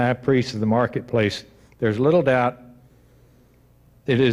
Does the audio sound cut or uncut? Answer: uncut